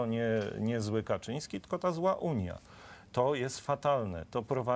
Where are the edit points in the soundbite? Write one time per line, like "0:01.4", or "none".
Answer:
none